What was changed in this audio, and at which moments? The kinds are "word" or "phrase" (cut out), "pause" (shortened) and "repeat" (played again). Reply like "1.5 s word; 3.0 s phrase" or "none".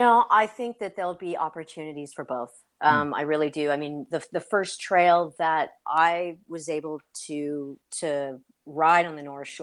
7.8 s pause